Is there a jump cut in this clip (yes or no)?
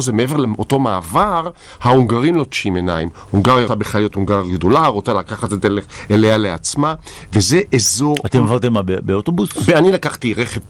yes